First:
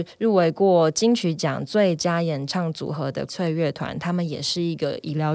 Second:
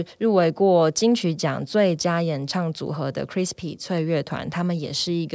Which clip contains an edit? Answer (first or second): first